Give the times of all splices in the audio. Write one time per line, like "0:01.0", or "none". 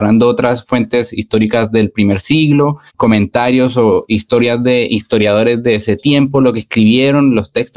0:02.9